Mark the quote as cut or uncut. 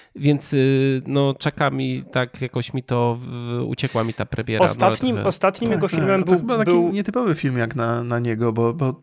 uncut